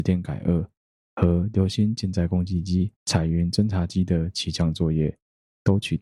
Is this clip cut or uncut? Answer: cut